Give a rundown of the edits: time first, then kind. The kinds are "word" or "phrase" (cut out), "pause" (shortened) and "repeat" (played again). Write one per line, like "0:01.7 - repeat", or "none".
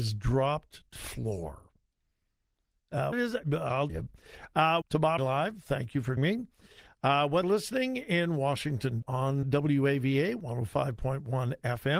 0:01.0 - word
0:03.1 - word
0:03.9 - word
0:04.8 - word
0:05.2 - word
0:06.2 - word
0:07.4 - word
0:09.0 - word
0:09.4 - word